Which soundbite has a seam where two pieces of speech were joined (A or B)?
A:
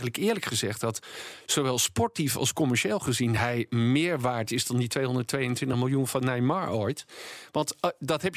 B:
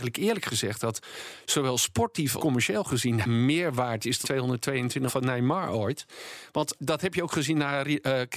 B